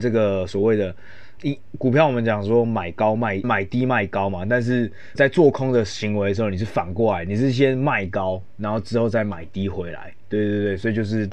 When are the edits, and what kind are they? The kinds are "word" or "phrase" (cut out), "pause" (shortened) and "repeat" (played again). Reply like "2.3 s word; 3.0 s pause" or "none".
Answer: 1.4 s word; 3.4 s word; 5.1 s word